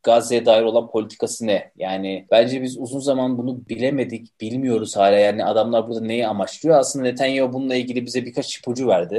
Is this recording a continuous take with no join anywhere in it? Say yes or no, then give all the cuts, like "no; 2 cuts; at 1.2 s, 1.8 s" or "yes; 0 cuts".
yes; 0 cuts